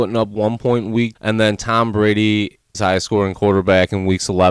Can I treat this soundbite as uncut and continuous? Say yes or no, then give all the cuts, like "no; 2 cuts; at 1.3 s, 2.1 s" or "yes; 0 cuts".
no; 2 cuts; at 1.2 s, 2.7 s